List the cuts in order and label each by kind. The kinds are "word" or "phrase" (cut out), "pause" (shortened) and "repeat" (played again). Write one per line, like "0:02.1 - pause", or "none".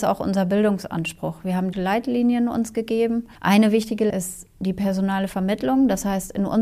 0:01.7 - word
0:03.4 - pause
0:04.1 - word